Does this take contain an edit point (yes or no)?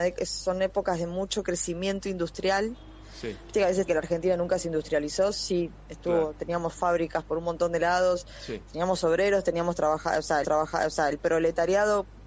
yes